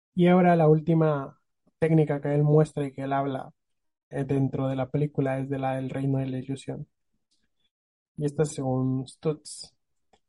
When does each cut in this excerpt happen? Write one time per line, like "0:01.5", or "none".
0:04.1
0:08.5

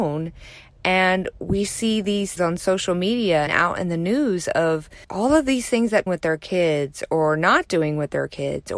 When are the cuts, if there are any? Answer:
0:02.4
0:03.5
0:05.0
0:06.1

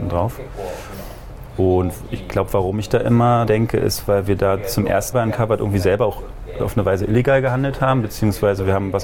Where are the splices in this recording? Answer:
0:03.5
0:05.1

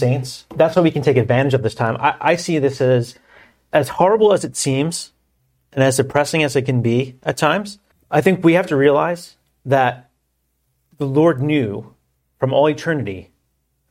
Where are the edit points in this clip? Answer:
0:03.7
0:07.9

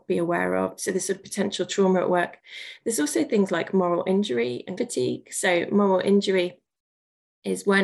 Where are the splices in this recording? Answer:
0:04.8

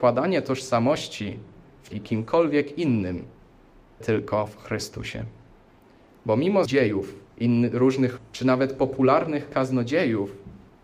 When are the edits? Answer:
0:01.9
0:04.0
0:06.7
0:07.3
0:08.2

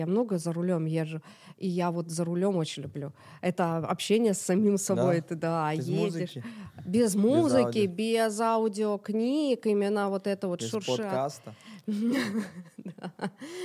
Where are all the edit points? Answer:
none

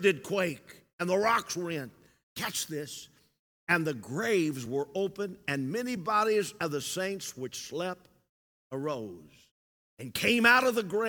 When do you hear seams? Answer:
none

